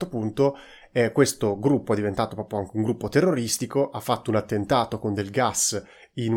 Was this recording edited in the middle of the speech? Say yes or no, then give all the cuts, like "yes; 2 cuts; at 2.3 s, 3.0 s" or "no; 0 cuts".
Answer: no; 0 cuts